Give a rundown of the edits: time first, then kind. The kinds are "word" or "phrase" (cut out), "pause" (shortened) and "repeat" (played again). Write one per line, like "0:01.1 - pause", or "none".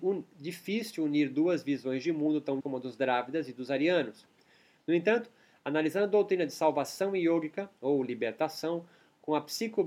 0:02.6 - word